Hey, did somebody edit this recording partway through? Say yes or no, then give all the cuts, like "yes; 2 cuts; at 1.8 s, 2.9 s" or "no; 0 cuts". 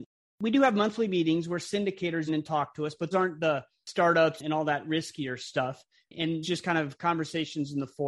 yes; 3 cuts; at 2.3 s, 3.1 s, 6.4 s